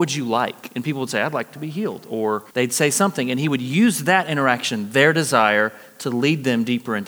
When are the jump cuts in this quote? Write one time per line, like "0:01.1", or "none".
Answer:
0:02.5